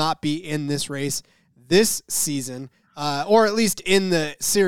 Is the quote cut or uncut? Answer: uncut